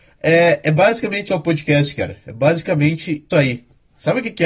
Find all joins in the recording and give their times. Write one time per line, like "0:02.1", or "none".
0:01.3
0:03.3